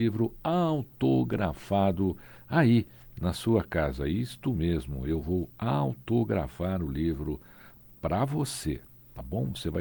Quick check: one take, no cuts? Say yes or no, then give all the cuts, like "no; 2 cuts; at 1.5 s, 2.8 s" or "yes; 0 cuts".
yes; 0 cuts